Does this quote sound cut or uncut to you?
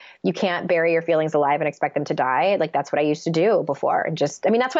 uncut